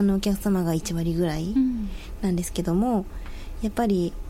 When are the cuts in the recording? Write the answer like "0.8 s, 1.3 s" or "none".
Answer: none